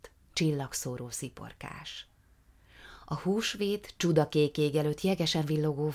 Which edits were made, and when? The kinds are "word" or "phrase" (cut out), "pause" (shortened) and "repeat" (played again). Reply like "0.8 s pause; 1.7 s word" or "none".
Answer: none